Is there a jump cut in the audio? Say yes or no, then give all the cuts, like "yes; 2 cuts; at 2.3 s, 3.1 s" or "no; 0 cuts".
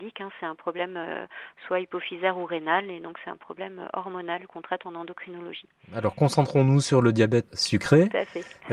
yes; 1 cut; at 7.5 s